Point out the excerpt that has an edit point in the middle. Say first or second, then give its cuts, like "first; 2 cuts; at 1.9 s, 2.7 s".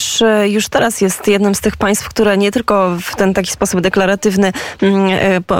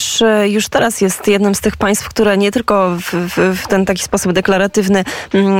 first; 1 cut; at 3.1 s